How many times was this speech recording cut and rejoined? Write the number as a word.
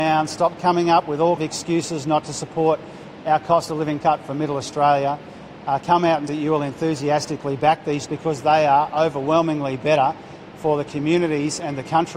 four